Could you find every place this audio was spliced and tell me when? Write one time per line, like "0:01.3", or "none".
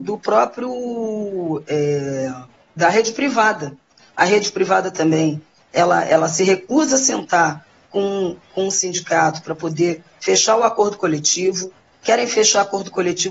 none